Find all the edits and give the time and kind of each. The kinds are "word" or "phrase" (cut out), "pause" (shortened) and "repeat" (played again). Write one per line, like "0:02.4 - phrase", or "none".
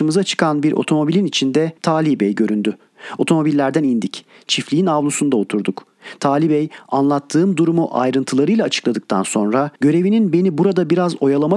0:01.8 - pause
0:09.8 - pause